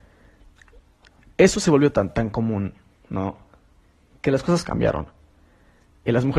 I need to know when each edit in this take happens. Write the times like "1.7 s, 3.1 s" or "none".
1.9 s